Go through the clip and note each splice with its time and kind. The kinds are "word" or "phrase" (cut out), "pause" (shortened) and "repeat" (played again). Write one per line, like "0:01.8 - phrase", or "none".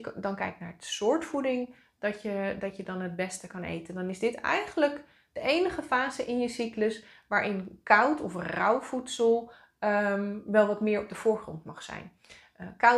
none